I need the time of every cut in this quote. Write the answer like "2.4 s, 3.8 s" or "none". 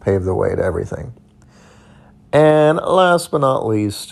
none